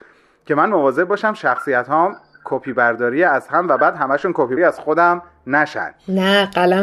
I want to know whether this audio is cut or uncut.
cut